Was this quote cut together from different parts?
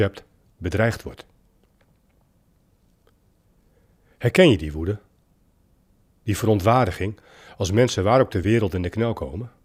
no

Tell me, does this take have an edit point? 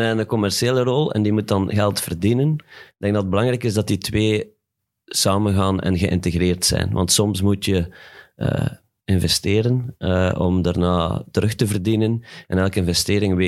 no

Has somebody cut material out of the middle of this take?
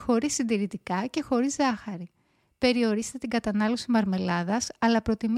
no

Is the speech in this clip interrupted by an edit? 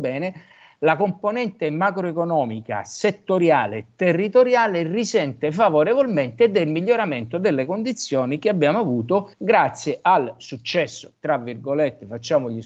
yes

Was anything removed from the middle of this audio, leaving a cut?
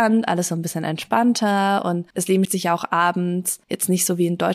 yes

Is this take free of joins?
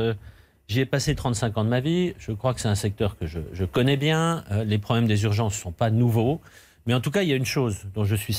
yes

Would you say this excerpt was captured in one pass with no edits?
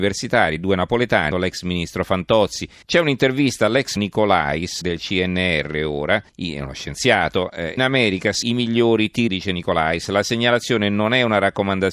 no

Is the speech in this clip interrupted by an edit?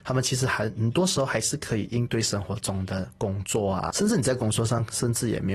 yes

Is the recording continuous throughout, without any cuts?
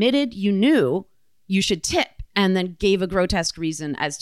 yes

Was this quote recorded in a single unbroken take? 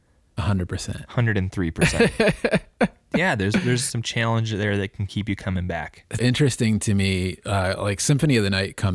no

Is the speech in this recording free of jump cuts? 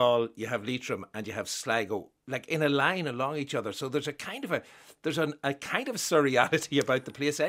yes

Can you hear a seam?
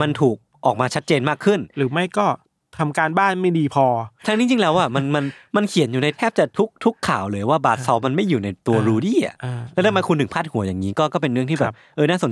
yes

